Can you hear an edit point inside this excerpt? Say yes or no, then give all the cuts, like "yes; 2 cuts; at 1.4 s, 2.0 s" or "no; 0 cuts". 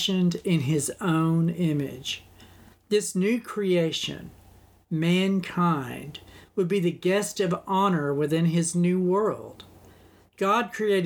no; 0 cuts